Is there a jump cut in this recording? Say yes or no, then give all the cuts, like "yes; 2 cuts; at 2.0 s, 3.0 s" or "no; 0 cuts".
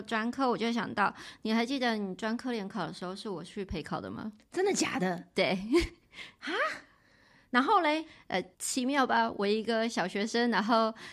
yes; 1 cut; at 8.5 s